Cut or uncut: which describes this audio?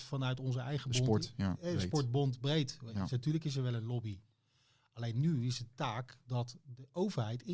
uncut